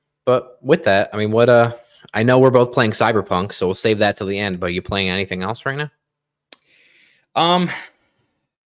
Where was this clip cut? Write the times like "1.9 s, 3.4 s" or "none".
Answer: none